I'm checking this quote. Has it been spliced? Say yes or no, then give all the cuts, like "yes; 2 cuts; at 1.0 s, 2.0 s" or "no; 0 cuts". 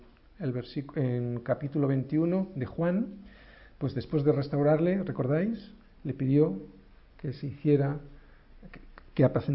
no; 0 cuts